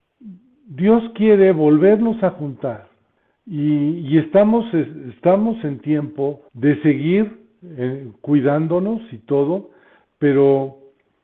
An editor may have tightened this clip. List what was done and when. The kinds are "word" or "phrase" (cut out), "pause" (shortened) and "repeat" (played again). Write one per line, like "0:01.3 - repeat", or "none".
0:03.2 - pause
0:06.5 - word